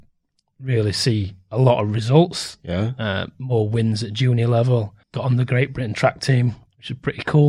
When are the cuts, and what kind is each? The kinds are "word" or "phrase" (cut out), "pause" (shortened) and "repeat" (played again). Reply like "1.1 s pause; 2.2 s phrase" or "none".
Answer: 5.0 s pause